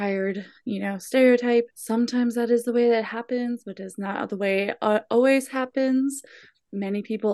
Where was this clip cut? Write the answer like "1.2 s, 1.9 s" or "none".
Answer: 1.7 s